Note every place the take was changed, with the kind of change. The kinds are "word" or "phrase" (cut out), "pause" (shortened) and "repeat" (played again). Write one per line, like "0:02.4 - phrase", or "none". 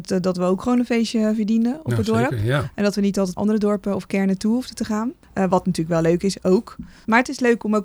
0:03.4 - phrase
0:05.2 - pause